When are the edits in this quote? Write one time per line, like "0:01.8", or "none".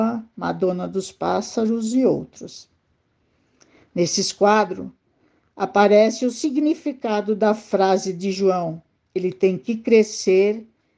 none